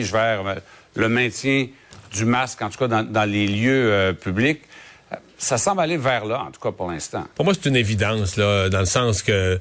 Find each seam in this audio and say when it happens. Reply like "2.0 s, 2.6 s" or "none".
7.3 s